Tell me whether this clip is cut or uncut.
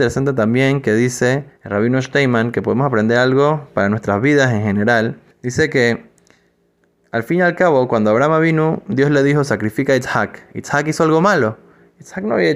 cut